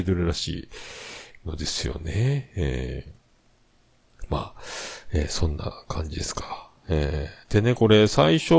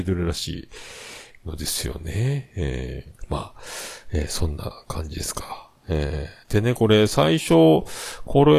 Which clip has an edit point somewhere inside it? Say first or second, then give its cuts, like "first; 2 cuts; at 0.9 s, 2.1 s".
second; 1 cut; at 3.2 s